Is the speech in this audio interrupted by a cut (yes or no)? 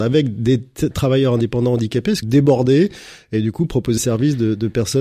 yes